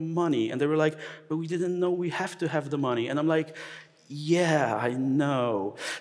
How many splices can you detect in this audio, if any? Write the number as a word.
zero